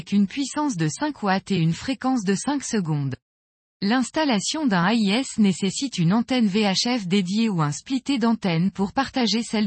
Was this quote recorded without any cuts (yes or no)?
yes